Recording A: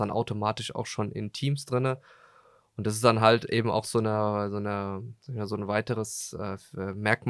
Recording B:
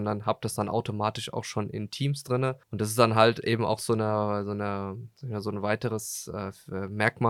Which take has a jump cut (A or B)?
B